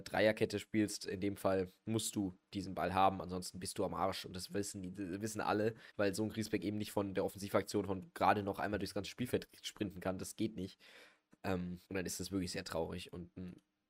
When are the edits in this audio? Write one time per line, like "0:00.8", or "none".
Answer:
0:05.9
0:11.9

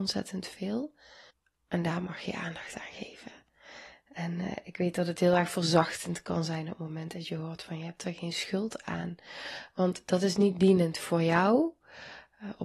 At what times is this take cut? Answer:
0:01.3

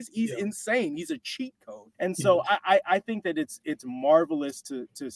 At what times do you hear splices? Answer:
0:01.9

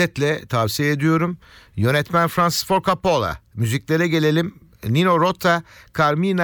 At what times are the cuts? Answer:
none

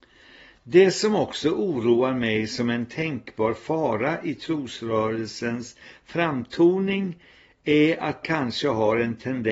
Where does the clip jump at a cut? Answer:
0:08.2

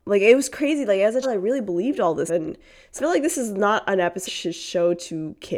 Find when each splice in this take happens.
0:01.2
0:02.3
0:03.0
0:04.3

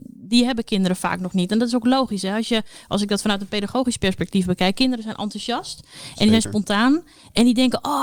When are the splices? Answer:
none

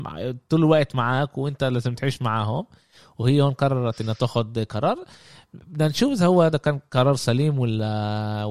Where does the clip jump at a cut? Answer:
none

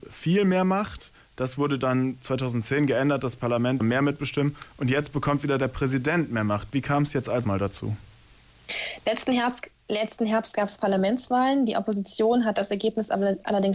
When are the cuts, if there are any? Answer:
0:03.8
0:07.4

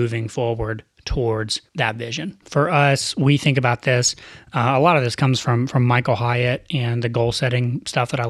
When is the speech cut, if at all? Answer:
0:01.7
0:02.4

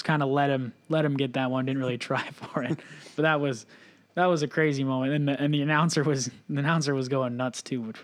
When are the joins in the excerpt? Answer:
none

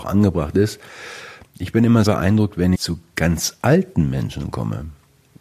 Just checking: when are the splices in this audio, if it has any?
0:02.1
0:02.7

